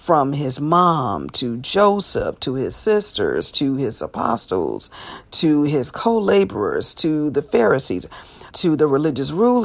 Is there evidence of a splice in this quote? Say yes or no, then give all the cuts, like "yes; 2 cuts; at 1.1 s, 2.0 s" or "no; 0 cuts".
yes; 1 cut; at 8.5 s